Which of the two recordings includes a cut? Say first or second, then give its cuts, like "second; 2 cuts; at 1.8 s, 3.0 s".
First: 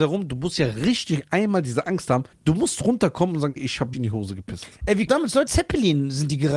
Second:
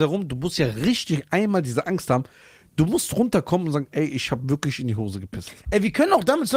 first; 5 cuts; at 2.3 s, 3.6 s, 3.9 s, 5.1 s, 5.5 s